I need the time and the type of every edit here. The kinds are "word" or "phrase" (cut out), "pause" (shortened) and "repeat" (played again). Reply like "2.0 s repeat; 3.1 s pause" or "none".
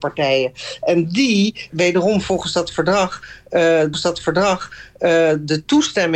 1.7 s word; 3.9 s repeat